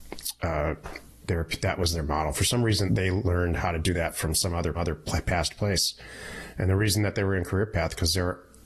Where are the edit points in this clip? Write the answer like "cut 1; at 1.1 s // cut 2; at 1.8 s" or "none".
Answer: cut 1; at 1.2 s // cut 2; at 2.9 s // cut 3; at 4.7 s